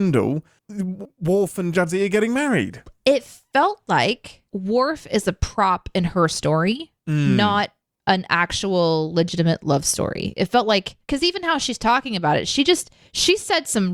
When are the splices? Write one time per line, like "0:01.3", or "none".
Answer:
0:07.0
0:11.0